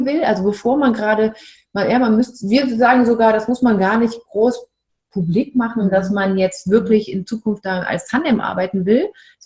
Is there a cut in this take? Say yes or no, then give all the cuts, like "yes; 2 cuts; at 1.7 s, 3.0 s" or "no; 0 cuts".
no; 0 cuts